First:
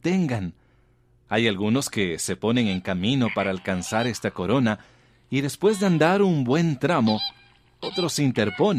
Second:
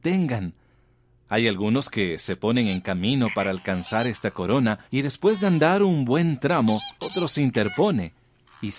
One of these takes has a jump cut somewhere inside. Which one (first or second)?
second